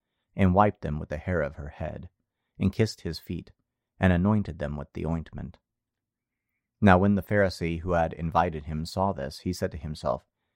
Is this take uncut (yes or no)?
yes